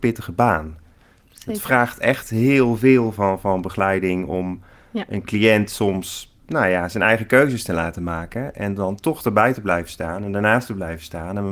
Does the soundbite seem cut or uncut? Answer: uncut